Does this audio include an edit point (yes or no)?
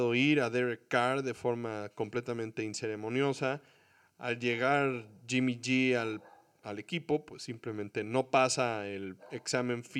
no